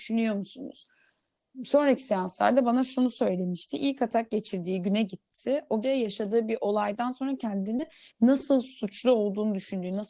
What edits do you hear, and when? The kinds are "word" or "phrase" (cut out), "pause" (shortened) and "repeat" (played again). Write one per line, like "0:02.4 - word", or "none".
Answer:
0:05.8 - word

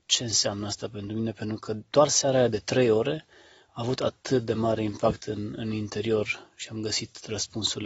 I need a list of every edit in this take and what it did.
none

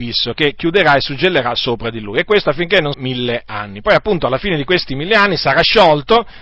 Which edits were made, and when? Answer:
0:02.9 - phrase

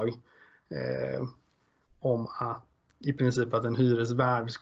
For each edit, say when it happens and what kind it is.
0:02.9 - word

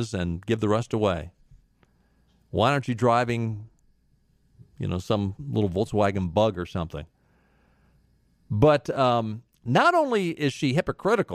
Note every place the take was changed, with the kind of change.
none

